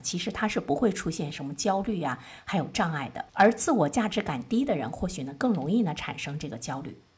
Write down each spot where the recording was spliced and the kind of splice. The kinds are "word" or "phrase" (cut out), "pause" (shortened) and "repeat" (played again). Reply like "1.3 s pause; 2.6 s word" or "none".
3.3 s pause